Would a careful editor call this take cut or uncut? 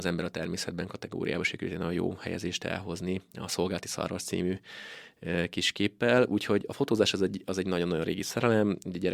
uncut